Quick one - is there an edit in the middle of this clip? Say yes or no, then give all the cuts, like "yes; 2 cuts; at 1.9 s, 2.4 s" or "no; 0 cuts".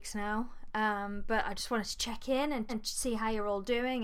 yes; 1 cut; at 2.7 s